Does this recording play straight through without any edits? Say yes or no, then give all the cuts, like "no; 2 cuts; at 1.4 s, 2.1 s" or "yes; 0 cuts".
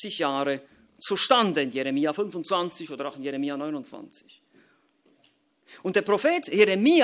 yes; 0 cuts